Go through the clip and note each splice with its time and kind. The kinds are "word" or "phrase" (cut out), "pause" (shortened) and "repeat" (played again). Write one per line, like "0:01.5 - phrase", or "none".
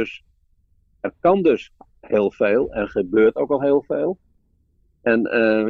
none